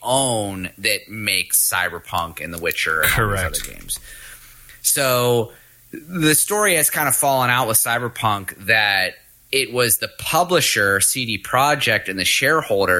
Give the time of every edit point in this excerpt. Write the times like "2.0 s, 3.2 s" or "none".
none